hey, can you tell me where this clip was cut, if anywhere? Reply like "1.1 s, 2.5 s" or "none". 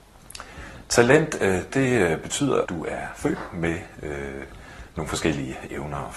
1.7 s, 2.7 s